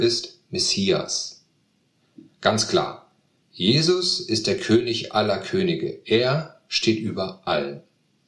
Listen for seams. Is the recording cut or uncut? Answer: uncut